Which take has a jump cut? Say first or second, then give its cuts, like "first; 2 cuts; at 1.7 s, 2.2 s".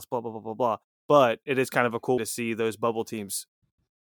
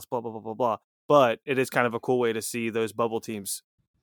first; 1 cut; at 2.2 s